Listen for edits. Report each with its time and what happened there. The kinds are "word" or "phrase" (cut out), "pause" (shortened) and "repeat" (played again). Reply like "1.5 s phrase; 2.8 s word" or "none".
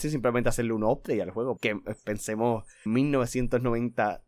1.6 s word; 2.9 s word